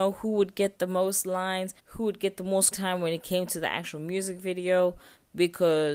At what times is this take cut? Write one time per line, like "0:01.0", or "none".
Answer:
0:01.8
0:02.7